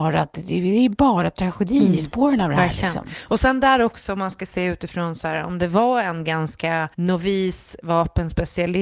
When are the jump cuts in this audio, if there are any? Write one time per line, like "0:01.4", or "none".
0:06.9